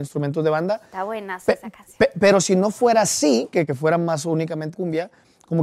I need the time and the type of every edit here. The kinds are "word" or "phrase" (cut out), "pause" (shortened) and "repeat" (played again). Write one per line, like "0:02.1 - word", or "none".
0:03.7 - phrase
0:04.7 - phrase